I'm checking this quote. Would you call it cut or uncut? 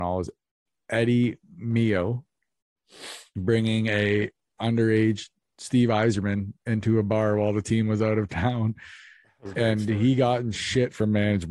uncut